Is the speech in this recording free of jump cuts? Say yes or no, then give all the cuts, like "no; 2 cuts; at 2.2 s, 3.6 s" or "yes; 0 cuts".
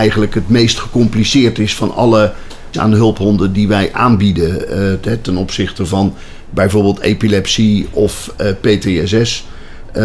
no; 1 cut; at 2.7 s